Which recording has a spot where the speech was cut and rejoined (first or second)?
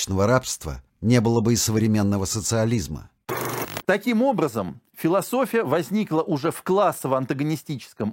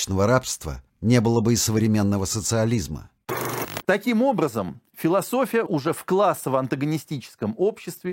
second